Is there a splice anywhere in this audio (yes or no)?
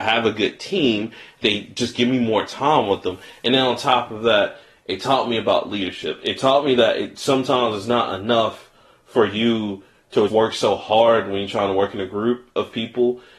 yes